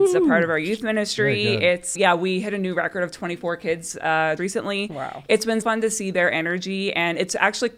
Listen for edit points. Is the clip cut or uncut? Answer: cut